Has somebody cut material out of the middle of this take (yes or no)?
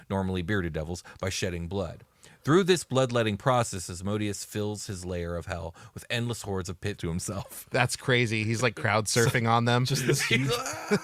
yes